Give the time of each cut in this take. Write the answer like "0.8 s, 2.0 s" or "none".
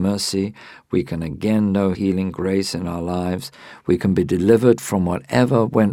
1.9 s